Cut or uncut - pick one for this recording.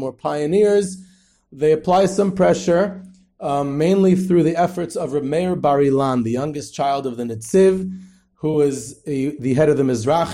uncut